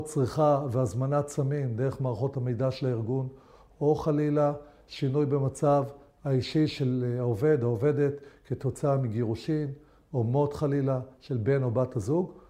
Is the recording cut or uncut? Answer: uncut